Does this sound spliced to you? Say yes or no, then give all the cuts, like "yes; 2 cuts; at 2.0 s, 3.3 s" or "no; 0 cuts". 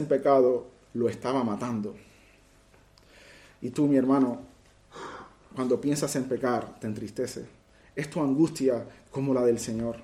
no; 0 cuts